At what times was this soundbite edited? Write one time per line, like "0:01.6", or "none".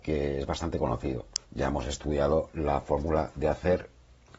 0:01.4